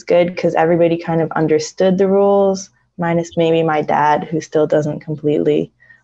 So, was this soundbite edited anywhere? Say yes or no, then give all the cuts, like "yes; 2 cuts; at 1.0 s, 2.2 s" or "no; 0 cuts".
no; 0 cuts